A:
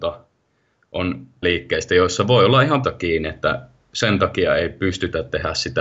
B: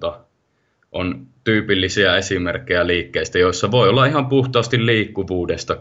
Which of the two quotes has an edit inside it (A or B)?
A